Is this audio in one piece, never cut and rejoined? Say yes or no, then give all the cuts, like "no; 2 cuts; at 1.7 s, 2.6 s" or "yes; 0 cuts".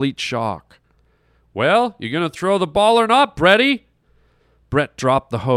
yes; 0 cuts